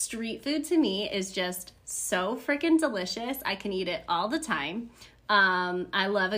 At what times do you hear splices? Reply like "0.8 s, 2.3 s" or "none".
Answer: none